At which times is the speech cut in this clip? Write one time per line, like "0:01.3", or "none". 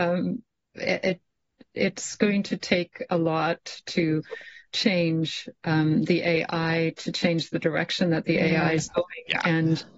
none